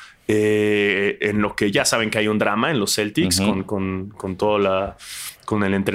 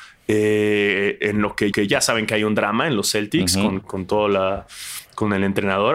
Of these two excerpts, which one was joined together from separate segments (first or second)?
second